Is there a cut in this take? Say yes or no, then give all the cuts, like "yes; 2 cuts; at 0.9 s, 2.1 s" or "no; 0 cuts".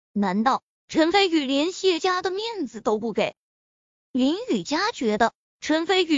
no; 0 cuts